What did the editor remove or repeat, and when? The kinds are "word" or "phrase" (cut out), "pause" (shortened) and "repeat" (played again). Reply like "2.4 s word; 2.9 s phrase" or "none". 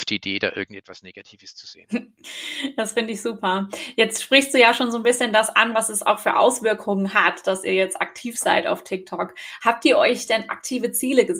none